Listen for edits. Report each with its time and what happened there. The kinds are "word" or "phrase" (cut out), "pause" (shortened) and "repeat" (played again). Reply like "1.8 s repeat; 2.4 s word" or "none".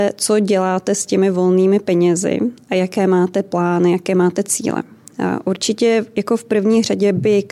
none